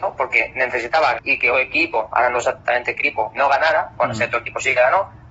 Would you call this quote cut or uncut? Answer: cut